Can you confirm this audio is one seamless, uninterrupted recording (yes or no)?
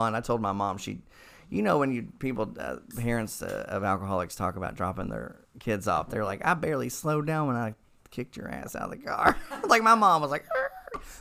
yes